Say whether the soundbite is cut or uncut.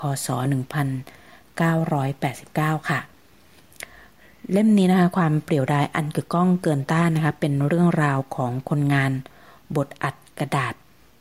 uncut